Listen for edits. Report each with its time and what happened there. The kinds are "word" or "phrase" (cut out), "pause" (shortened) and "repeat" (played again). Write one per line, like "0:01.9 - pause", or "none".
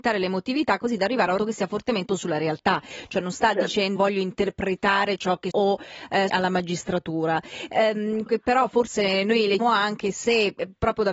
0:01.4 - word
0:02.1 - word
0:04.0 - word
0:05.5 - word
0:06.3 - word
0:08.3 - word
0:09.6 - word